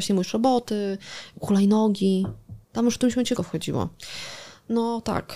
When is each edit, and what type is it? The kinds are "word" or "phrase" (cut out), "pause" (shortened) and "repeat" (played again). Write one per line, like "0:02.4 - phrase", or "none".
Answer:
0:02.6 - pause
0:03.4 - word